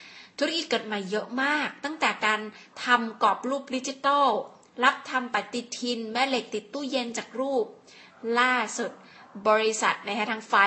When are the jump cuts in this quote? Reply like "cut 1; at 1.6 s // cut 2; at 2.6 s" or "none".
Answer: none

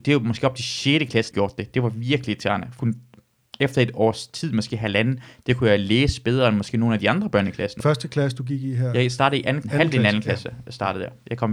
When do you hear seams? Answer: cut 1; at 1.3 s // cut 2; at 2.8 s // cut 3; at 7.8 s // cut 4; at 9.6 s

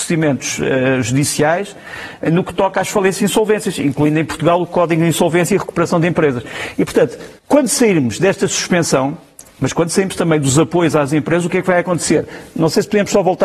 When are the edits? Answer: cut 1; at 7.4 s

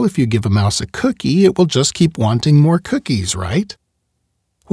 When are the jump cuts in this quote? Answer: none

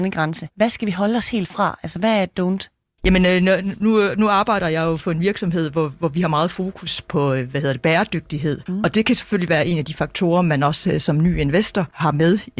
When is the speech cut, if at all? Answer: none

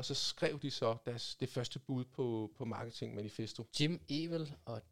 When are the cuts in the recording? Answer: cut 1; at 3.7 s

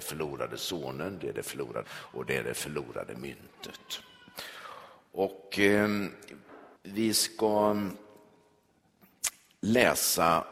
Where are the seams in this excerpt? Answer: cut 1; at 1.8 s // cut 2; at 6.8 s

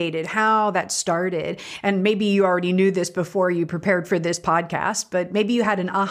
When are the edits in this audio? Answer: none

